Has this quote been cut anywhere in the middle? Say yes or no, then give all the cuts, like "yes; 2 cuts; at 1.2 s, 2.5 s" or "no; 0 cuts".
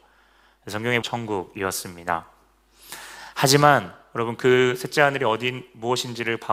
yes; 1 cut; at 1.0 s